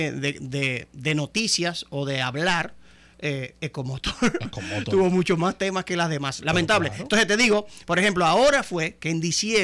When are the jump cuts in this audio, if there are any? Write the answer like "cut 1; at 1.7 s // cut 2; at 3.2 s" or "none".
none